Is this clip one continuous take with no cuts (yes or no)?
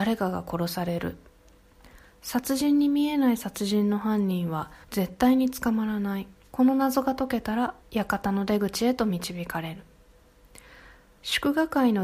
no